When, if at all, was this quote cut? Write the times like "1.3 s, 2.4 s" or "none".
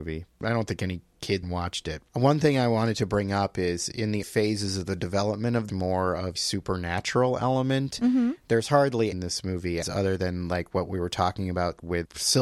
1.4 s, 2.1 s, 4.2 s, 5.7 s, 6.4 s, 9.1 s, 9.8 s